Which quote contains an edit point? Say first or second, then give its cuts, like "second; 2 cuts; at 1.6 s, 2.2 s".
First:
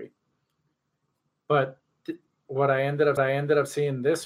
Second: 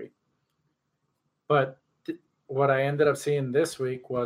first; 1 cut; at 3.2 s